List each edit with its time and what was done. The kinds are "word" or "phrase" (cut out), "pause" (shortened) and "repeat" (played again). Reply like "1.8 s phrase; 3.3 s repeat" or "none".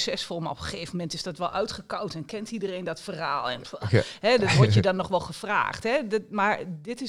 none